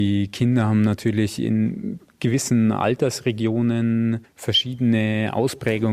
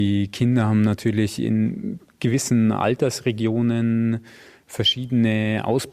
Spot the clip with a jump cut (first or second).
first